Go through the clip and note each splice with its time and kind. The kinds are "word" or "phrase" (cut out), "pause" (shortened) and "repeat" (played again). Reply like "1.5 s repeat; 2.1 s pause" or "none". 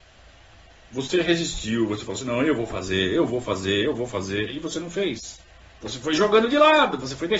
5.7 s pause